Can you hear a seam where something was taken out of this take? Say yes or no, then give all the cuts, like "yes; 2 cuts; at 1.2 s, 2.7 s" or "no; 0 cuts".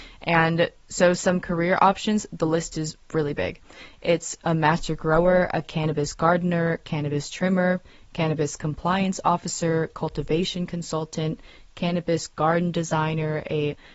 no; 0 cuts